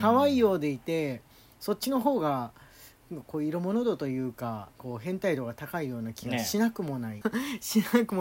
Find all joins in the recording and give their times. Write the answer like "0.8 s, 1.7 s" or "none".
4.7 s, 7.2 s